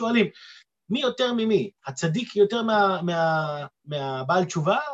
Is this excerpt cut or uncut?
uncut